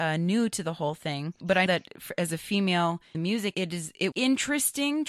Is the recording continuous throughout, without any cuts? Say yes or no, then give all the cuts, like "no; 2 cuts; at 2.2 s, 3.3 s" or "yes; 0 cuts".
no; 4 cuts; at 1.7 s, 3.1 s, 3.5 s, 4.1 s